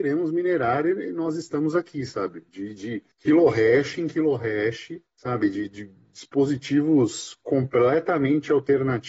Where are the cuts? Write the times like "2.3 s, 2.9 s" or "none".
2.5 s, 3.1 s, 5.1 s